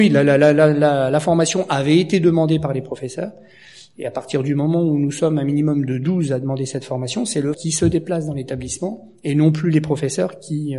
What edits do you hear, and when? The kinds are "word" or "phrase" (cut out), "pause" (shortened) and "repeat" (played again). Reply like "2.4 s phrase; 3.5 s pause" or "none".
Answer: 7.5 s word